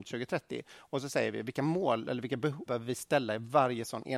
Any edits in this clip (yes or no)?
yes